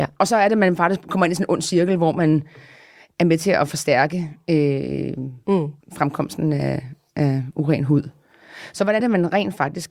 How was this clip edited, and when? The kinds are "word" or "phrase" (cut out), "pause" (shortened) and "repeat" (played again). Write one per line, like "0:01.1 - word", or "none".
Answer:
0:05.8 - pause
0:09.0 - word